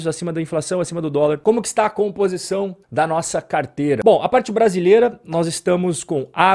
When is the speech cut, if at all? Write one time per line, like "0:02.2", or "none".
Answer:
0:02.8